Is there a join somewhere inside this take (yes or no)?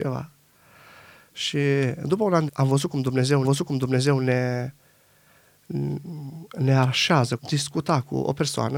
yes